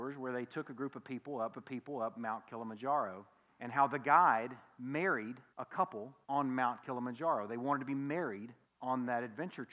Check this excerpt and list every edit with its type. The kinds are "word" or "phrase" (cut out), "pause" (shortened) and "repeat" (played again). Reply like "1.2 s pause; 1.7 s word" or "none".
1.5 s repeat; 3.5 s pause; 5.5 s pause; 6.2 s pause; 8.6 s pause